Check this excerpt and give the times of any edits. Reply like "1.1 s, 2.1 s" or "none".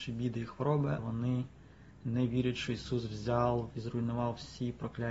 1.0 s, 3.7 s